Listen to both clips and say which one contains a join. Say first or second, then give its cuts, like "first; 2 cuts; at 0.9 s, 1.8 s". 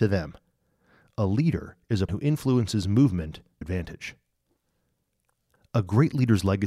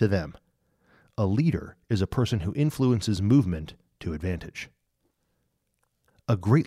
first; 2 cuts; at 2.1 s, 3.6 s